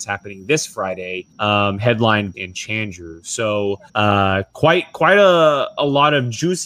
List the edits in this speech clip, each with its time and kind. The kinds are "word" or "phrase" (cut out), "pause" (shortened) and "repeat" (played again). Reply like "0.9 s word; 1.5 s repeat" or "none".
1.3 s pause; 2.3 s phrase; 3.9 s pause

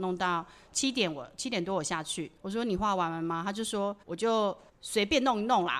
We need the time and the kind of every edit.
2.4 s pause; 4.0 s pause; 4.7 s pause

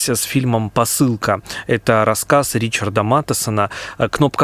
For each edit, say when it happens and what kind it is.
none

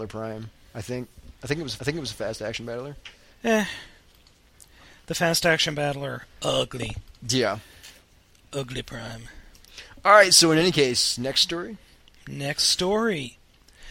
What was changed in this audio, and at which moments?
1.8 s repeat; 7.2 s pause

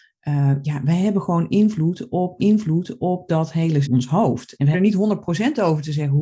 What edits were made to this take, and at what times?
2.4 s repeat; 3.8 s phrase; 4.7 s phrase

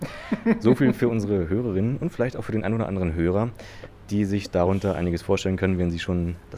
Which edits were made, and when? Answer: none

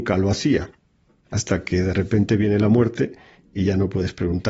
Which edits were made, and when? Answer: none

